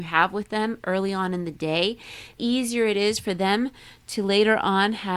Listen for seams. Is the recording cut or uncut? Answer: cut